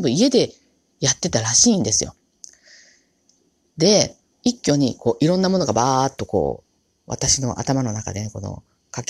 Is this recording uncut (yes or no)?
no